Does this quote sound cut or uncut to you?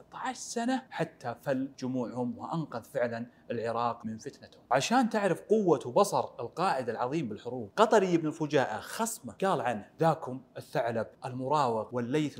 cut